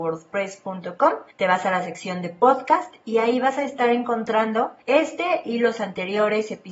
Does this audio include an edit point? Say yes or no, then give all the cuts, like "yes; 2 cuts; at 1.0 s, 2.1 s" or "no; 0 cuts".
yes; 2 cuts; at 1.3 s, 4.8 s